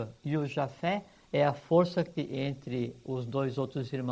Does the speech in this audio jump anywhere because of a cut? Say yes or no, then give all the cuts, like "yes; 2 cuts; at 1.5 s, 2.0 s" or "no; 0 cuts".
yes; 1 cut; at 2.1 s